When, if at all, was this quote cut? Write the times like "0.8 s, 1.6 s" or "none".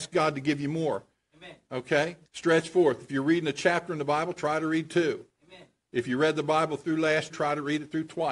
2.3 s, 7.3 s